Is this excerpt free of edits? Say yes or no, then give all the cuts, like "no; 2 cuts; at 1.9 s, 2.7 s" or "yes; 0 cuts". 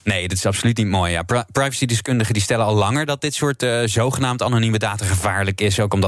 yes; 0 cuts